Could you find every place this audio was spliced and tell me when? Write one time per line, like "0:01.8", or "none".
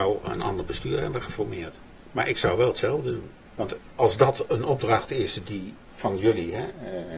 none